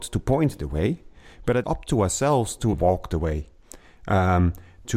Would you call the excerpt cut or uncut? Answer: cut